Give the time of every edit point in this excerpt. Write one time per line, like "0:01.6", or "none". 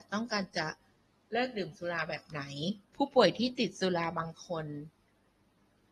0:01.0
0:02.8